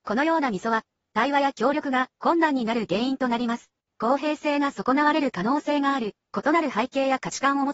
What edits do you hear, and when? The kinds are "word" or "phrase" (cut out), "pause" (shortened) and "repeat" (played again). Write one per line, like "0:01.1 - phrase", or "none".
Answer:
none

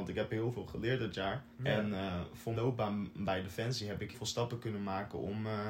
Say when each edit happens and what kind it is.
0:01.5 - pause
0:02.5 - word
0:04.1 - word

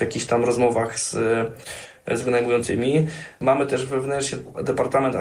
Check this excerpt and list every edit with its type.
none

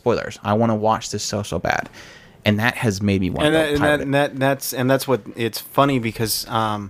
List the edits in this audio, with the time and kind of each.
none

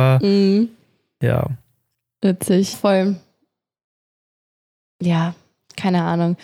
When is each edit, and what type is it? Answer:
0:02.7 - word

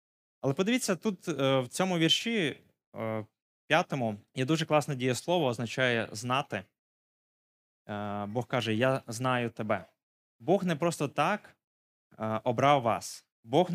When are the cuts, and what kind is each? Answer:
0:04.3 - pause
0:10.1 - pause

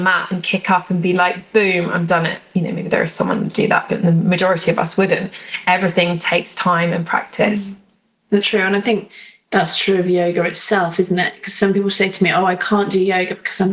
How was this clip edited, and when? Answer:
0:08.4 - word

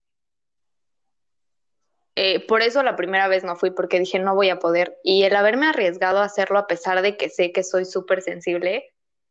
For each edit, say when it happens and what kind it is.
none

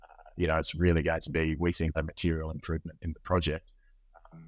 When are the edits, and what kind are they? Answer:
0:01.9 - word

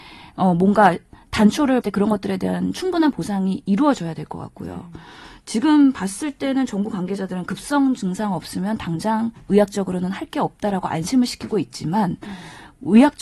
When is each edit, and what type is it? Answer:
0:01.8 - word

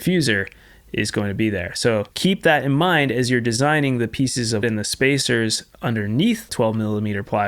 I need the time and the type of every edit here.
0:02.1 - pause
0:04.6 - word
0:06.5 - word

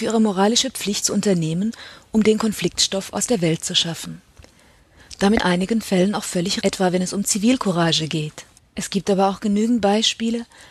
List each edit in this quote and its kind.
0:01.0 - word
0:05.4 - phrase
0:06.6 - word
0:08.6 - pause

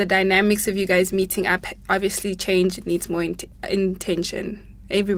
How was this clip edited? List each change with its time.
none

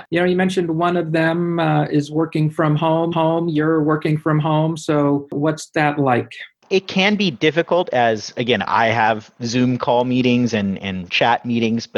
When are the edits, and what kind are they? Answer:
0:03.1 - repeat
0:11.1 - word

